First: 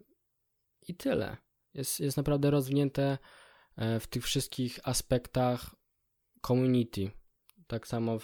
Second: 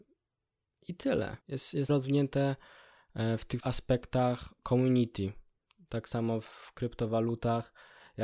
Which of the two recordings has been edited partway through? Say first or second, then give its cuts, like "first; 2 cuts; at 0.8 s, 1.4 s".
second; 4 cuts; at 1.4 s, 1.9 s, 3.6 s, 4.6 s